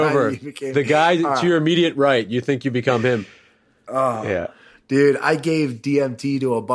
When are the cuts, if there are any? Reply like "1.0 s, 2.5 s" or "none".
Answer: 5.2 s